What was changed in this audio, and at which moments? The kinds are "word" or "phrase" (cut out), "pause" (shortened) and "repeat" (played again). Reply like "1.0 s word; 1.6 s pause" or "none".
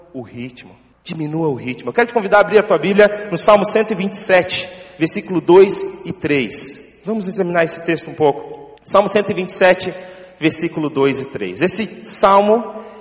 0.9 s pause; 8.8 s pause